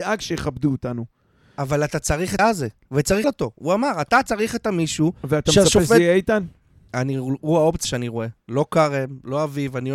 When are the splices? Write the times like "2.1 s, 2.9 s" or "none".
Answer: 2.4 s, 3.2 s, 7.8 s